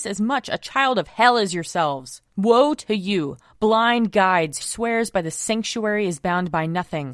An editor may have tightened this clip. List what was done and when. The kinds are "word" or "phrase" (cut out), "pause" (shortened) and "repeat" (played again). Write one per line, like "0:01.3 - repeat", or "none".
0:02.3 - pause
0:04.6 - phrase